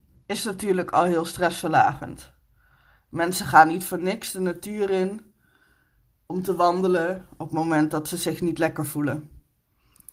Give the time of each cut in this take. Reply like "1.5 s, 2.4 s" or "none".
none